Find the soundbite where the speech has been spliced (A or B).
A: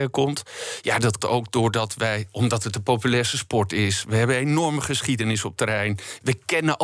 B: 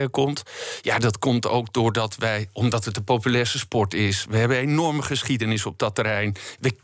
A